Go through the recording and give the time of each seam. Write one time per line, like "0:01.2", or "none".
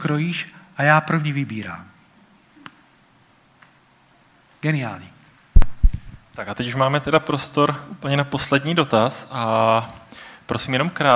none